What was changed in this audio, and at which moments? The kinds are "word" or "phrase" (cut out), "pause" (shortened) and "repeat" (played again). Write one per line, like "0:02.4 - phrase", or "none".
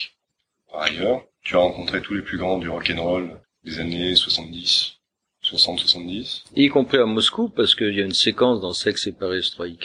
0:01.3 - pause
0:03.4 - pause